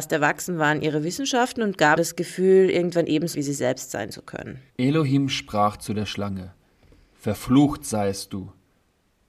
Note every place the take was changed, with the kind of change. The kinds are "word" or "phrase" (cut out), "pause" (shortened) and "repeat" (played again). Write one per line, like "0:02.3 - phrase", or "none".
0:02.0 - word
0:03.3 - word
0:04.7 - pause